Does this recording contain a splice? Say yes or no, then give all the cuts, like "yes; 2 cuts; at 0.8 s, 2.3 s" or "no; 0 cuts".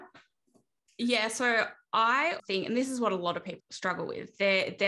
yes; 2 cuts; at 2.4 s, 3.6 s